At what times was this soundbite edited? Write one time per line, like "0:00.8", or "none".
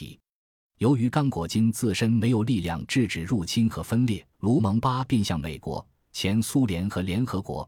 0:04.3

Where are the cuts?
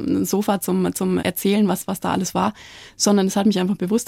0:01.2

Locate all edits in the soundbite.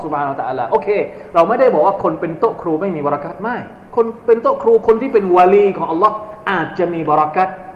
0:03.9

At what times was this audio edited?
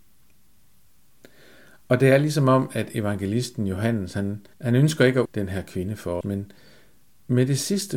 0:04.5
0:05.3
0:06.2

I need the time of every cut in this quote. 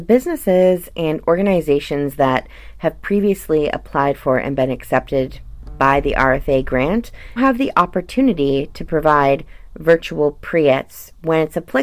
0:07.4

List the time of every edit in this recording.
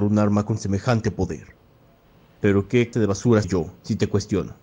0:02.0
0:02.9
0:03.4

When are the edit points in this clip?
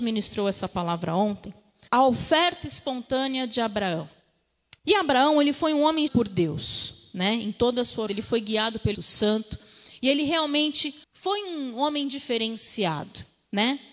0:01.9
0:04.8
0:06.1
0:08.1
0:08.9
0:11.0

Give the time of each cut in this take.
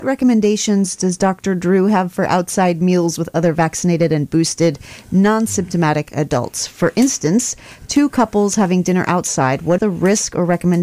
0:09.8

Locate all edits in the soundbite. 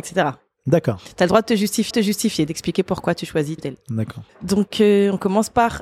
0:01.9
0:03.6
0:04.3

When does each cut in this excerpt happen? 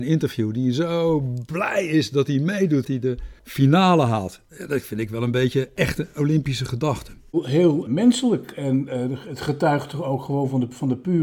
0:02.8
0:03.4
0:04.5
0:07.9

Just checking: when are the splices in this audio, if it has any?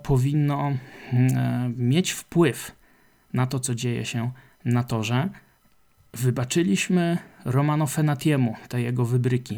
0:04.5

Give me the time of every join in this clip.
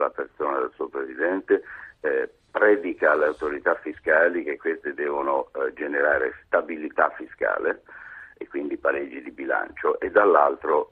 none

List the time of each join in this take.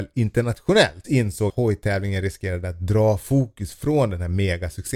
0:01.5

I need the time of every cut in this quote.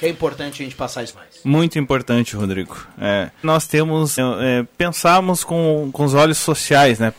0:01.1
0:03.4
0:04.2

